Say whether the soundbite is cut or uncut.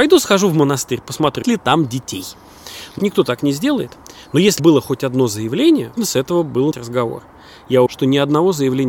cut